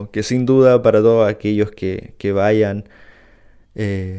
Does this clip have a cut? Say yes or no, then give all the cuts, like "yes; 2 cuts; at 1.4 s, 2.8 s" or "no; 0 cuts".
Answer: no; 0 cuts